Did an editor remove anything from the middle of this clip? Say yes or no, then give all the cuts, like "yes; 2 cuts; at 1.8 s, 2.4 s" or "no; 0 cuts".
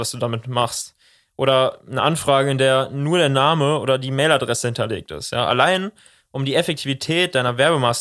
no; 0 cuts